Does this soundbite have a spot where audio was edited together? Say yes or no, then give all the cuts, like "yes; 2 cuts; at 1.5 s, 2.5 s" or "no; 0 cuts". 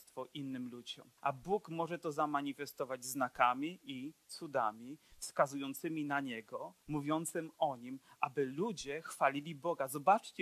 yes; 3 cuts; at 1.2 s, 4.2 s, 6.8 s